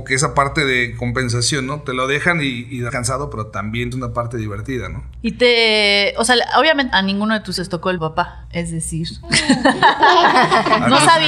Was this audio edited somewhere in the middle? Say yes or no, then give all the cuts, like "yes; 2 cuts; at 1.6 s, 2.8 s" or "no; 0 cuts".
yes; 5 cuts; at 2.9 s, 3.9 s, 6.9 s, 7.6 s, 8.0 s